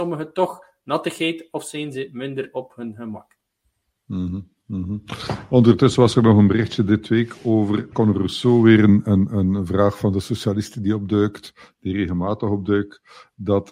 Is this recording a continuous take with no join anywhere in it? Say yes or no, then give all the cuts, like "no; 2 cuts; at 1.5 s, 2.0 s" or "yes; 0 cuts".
yes; 0 cuts